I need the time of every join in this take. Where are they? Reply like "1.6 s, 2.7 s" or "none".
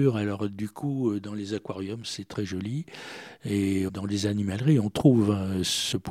none